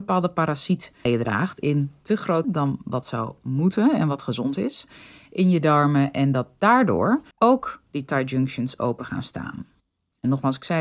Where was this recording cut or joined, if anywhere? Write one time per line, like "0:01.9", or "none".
0:01.1
0:02.4
0:07.3

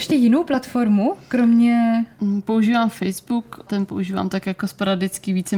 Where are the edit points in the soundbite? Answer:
0:03.7

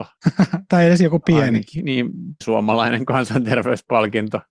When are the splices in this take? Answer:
0:02.4

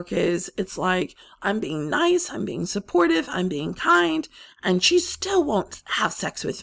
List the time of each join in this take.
none

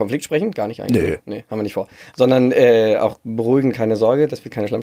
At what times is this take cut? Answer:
none

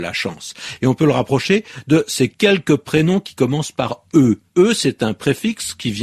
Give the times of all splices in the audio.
0:04.5

